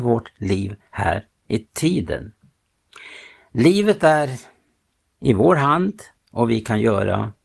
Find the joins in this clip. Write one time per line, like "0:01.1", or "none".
none